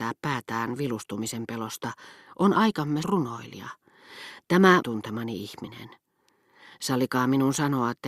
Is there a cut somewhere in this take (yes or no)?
yes